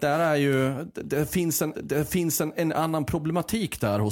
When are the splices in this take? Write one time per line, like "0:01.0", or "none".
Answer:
0:01.7